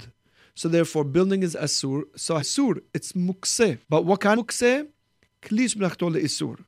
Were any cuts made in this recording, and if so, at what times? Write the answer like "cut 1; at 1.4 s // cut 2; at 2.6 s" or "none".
cut 1; at 2.4 s // cut 2; at 3.8 s // cut 3; at 4.4 s